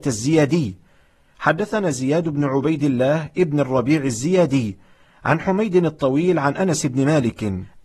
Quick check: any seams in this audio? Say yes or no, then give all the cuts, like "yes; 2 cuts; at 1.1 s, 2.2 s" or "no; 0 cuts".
no; 0 cuts